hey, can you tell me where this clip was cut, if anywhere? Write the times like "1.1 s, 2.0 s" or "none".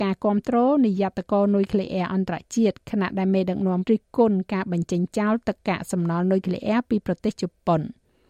3.8 s